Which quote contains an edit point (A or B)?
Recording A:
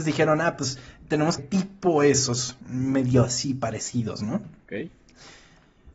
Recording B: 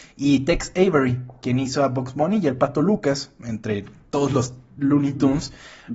A